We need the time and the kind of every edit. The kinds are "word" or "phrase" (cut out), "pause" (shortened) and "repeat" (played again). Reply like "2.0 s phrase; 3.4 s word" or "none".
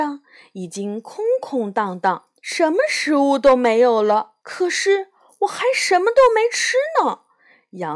2.4 s pause; 4.4 s pause